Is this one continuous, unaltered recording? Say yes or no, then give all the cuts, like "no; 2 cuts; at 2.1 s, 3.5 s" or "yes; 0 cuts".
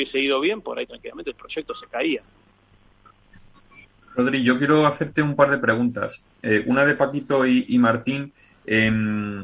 yes; 0 cuts